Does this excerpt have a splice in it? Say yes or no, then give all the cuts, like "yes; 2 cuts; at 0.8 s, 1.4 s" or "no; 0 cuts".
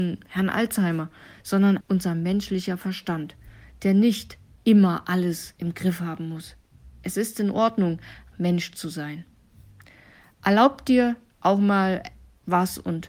yes; 2 cuts; at 1.8 s, 8.3 s